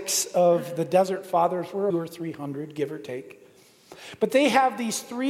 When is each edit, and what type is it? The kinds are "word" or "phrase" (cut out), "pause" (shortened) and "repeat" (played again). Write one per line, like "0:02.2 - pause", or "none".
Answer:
0:01.9 - phrase